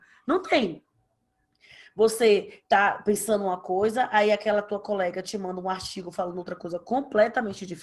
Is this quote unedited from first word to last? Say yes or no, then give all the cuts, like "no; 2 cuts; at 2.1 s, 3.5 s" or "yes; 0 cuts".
no; 1 cut; at 2.7 s